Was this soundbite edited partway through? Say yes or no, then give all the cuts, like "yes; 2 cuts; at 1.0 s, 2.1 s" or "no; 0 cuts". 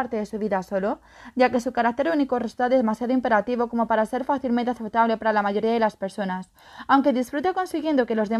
no; 0 cuts